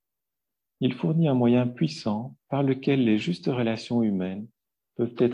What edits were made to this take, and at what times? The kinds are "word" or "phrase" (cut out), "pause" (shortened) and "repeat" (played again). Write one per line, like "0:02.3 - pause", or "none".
0:02.4 - pause